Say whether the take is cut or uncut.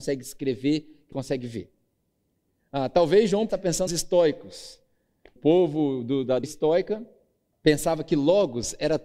cut